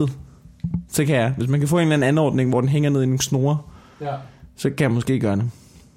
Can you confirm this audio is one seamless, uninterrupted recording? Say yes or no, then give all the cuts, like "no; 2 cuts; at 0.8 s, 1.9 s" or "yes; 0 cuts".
yes; 0 cuts